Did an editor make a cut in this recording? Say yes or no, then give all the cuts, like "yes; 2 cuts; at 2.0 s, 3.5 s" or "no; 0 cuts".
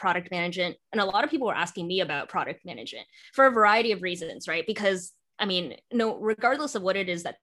no; 0 cuts